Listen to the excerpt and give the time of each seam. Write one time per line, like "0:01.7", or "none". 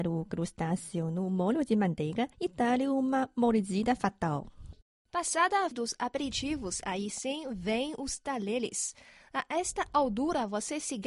0:02.3
0:05.7

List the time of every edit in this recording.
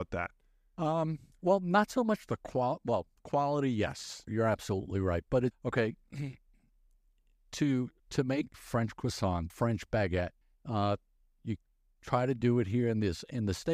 0:04.3
0:05.5
0:08.0
0:08.5
0:09.5
0:10.4

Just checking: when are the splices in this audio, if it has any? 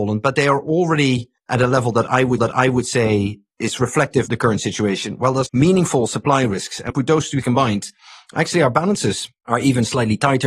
0:01.4
0:02.4
0:04.3
0:05.5
0:06.9
0:07.4

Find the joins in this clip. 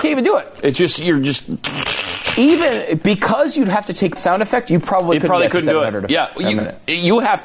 0:04.2

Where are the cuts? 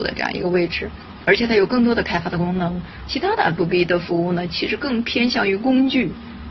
0:03.6

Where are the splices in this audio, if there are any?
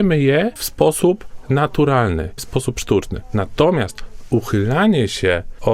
0:02.4

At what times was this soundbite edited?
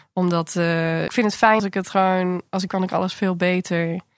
0:01.1
0:01.6
0:02.7

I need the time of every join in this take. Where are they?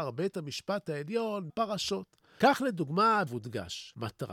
0:01.5
0:03.3

